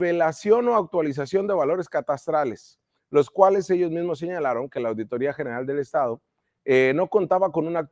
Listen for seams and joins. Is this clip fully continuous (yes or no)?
yes